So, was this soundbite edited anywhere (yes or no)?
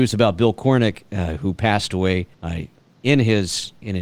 yes